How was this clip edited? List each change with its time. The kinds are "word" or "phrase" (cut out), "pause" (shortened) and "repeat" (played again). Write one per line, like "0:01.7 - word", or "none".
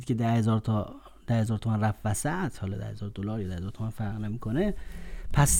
none